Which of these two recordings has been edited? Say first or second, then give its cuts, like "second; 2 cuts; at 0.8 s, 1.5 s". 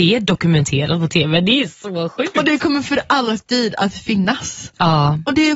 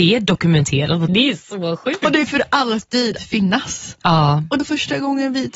second; 4 cuts; at 1.1 s, 2.3 s, 3.2 s, 4.6 s